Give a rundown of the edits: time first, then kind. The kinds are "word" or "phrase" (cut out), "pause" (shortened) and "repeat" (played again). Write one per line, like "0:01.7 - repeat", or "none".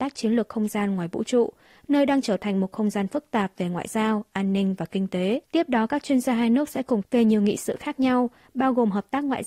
0:05.4 - pause
0:07.0 - phrase